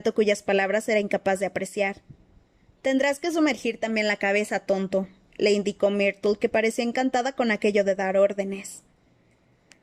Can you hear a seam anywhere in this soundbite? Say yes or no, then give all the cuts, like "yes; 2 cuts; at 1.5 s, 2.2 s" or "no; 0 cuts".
no; 0 cuts